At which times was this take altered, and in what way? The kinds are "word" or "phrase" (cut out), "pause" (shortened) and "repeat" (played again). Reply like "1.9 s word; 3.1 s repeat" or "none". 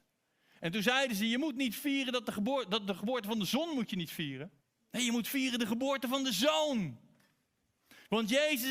4.6 s pause